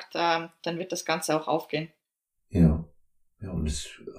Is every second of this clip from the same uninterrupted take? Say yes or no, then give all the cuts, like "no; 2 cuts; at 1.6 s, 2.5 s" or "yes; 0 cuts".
yes; 0 cuts